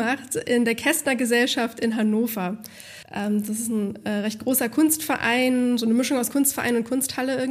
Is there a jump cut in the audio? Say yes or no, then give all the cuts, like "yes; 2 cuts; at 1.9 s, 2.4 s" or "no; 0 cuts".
yes; 1 cut; at 3.0 s